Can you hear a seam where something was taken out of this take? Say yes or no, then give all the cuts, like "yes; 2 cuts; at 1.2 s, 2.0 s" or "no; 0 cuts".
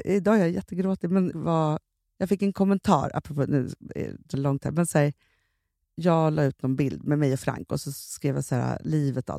yes; 2 cuts; at 1.3 s, 4.3 s